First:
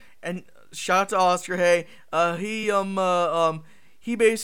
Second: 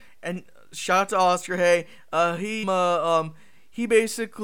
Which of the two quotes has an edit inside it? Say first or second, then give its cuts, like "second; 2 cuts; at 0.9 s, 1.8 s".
second; 1 cut; at 2.6 s